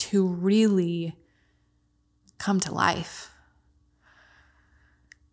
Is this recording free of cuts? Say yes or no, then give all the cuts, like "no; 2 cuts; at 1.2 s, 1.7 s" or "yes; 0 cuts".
yes; 0 cuts